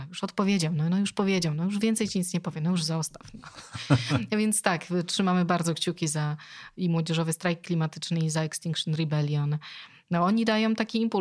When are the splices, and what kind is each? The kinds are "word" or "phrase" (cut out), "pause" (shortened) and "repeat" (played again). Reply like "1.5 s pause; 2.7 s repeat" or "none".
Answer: none